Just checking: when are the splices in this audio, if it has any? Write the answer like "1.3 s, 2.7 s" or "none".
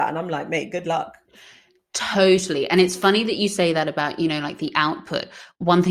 none